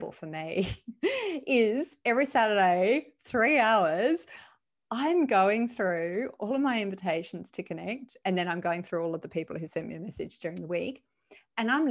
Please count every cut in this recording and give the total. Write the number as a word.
zero